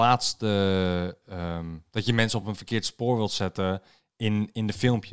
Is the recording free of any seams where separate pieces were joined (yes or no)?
yes